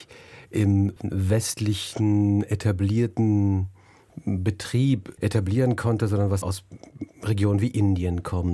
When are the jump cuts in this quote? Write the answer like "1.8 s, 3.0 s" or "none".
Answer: 6.4 s